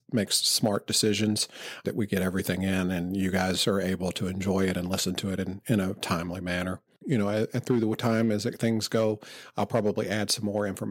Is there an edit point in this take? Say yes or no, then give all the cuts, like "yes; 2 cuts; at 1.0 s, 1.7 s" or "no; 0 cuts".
yes; 1 cut; at 1.8 s